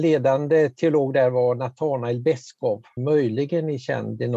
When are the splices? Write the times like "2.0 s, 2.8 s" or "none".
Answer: 3.0 s